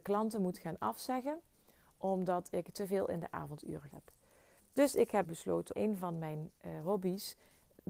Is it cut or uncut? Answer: cut